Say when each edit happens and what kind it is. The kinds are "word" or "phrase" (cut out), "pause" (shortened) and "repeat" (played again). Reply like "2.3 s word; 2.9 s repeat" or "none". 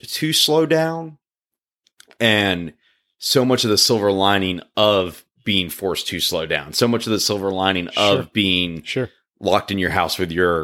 none